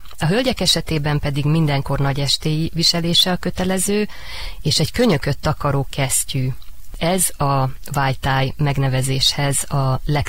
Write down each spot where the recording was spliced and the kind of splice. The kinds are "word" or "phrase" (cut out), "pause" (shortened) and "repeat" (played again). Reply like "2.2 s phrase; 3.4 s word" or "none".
none